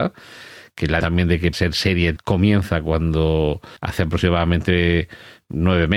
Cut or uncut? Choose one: cut